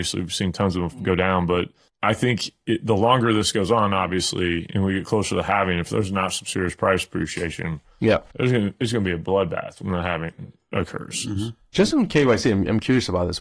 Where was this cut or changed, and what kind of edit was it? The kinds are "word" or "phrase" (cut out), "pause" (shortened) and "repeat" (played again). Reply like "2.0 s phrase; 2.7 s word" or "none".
1.9 s word; 11.9 s word